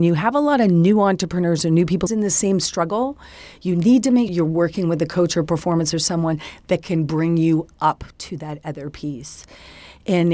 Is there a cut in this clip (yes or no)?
yes